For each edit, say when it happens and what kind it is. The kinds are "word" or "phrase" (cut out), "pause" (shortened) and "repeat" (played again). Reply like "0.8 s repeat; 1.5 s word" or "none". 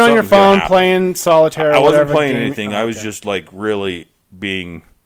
none